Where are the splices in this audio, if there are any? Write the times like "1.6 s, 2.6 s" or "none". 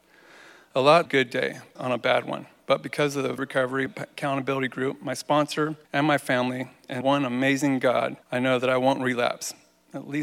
1.1 s, 1.8 s, 3.4 s, 3.9 s, 5.8 s, 7.0 s, 8.2 s